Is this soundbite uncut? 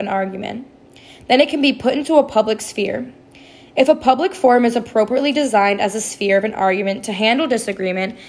yes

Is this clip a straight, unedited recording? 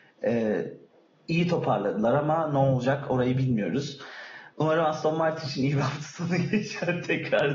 yes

